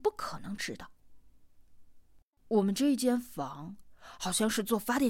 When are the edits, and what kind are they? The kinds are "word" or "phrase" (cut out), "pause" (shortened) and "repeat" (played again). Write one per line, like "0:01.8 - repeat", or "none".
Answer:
0:02.2 - pause